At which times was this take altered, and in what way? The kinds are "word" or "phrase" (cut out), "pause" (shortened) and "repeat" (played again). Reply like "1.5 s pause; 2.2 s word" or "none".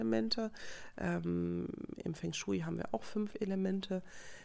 none

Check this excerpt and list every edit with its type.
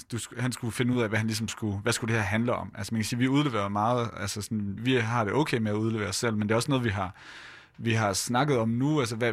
4.8 s word

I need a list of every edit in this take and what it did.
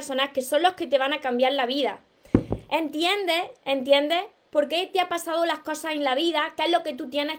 none

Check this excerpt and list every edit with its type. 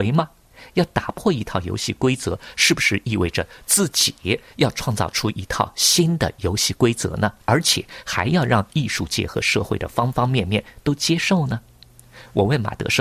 7.4 s pause

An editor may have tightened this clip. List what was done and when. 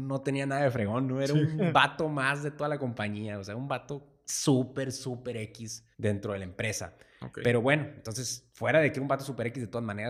5.9 s pause

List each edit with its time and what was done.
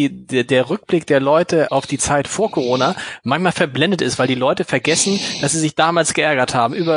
1.7 s word

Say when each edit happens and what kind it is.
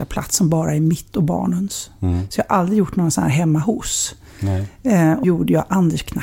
5.2 s word

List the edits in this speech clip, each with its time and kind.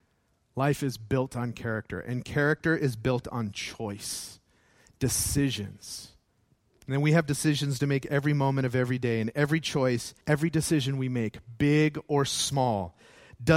6.3 s pause; 10.2 s pause

